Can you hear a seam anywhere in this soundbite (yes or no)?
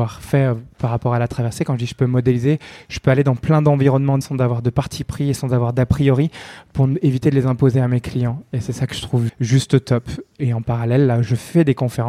yes